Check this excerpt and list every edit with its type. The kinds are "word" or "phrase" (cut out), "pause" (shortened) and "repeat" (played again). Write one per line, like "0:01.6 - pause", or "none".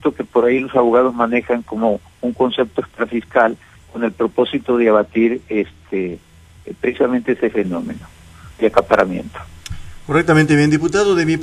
none